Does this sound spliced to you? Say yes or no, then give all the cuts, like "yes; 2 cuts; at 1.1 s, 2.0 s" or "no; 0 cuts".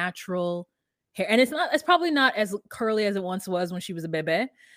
no; 0 cuts